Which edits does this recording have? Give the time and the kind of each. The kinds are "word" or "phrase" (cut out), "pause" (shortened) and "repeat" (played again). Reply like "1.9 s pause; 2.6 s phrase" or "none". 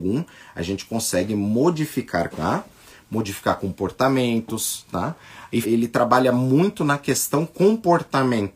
2.3 s word; 5.6 s word